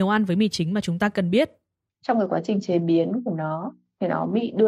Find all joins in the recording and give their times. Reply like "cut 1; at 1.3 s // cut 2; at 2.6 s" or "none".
none